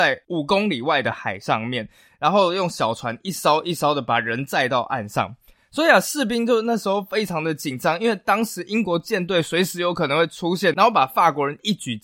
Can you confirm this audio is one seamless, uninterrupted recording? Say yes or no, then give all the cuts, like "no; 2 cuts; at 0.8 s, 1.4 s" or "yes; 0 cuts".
yes; 0 cuts